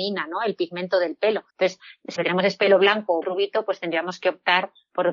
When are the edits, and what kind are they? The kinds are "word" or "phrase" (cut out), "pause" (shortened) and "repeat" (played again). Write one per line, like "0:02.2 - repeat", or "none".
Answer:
0:01.5 - pause
0:02.2 - word
0:03.2 - word